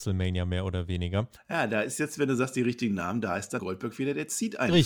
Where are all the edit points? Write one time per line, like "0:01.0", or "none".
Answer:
0:01.4
0:03.6